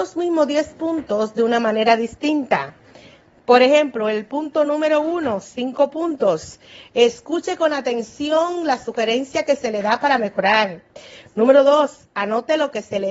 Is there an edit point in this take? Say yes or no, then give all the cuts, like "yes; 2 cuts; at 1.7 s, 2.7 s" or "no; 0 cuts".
no; 0 cuts